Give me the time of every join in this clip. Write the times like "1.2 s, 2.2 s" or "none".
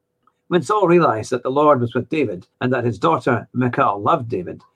2.5 s